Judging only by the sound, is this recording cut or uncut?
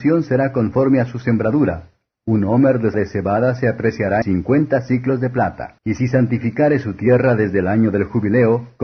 cut